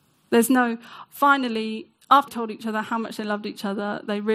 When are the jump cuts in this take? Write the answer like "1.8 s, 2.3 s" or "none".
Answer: 2.3 s